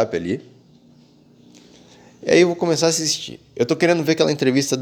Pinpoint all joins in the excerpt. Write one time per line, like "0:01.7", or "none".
none